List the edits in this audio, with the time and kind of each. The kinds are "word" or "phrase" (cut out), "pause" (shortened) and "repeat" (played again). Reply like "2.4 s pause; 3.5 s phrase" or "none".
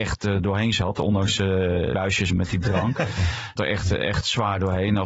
1.9 s word; 2.3 s word; 2.6 s word; 3.6 s phrase